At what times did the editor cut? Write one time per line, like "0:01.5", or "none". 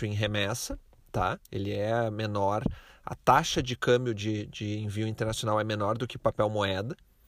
0:01.4

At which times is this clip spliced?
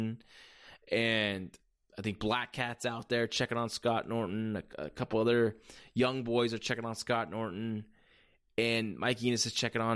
none

